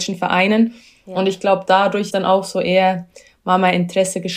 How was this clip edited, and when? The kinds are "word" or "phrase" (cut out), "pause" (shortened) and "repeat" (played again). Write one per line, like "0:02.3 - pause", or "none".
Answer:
0:02.1 - word